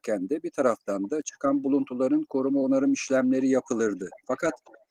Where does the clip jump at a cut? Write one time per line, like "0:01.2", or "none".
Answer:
none